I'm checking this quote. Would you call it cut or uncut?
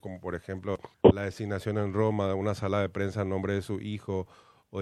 cut